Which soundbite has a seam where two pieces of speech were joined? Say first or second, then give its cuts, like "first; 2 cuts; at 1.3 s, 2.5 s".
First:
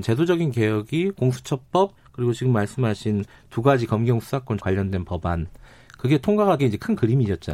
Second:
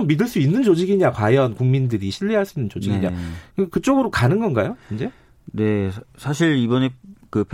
first; 3 cuts; at 2.0 s, 4.6 s, 6.6 s